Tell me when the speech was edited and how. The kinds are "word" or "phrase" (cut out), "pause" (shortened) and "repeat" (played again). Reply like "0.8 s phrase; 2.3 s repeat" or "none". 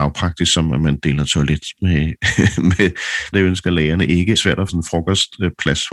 3.3 s phrase; 4.4 s phrase; 4.7 s word